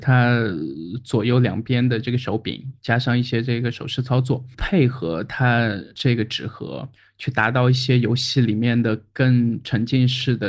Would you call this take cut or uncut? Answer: uncut